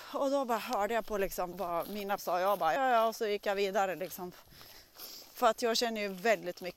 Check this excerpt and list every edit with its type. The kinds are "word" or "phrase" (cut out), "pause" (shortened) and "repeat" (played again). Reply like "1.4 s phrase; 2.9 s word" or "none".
1.5 s word; 2.2 s word; 2.8 s word